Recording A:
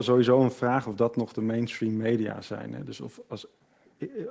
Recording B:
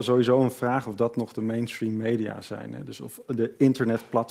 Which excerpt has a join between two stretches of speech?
B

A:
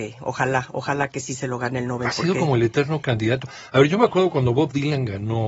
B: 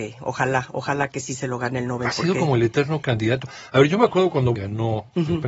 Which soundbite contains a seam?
B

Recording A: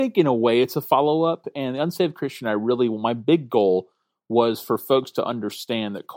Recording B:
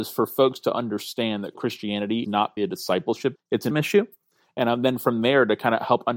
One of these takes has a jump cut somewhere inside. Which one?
B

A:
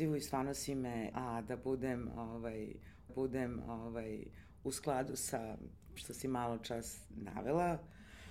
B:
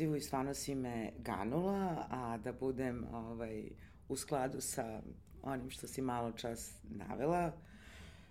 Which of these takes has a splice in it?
A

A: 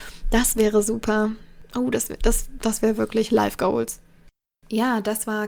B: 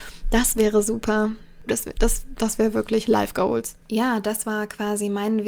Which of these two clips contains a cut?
B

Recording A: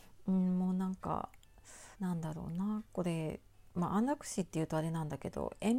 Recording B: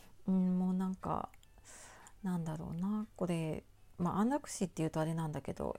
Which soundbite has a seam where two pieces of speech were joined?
A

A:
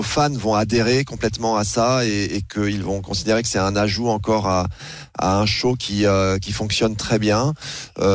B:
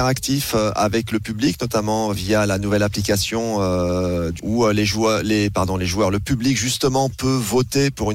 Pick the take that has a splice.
B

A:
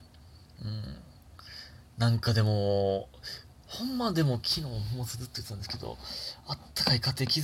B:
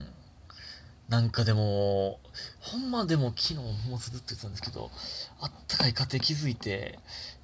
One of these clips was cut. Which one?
B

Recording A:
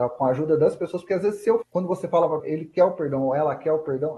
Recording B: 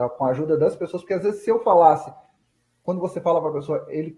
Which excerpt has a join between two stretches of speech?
A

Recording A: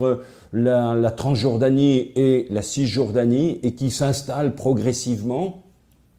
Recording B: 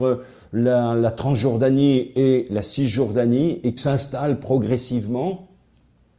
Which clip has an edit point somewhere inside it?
B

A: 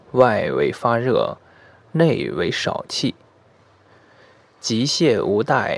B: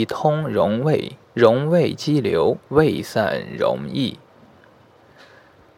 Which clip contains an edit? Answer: B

